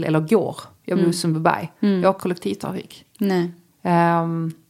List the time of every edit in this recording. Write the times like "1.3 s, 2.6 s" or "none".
2.2 s